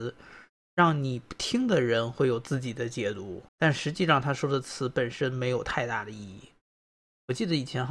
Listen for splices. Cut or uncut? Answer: cut